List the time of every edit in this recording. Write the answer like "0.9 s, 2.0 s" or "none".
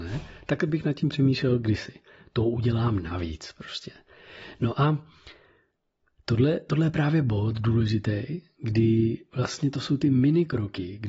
none